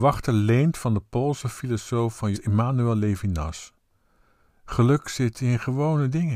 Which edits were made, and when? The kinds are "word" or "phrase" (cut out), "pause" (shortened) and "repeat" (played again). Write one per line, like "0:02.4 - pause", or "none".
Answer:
0:02.3 - phrase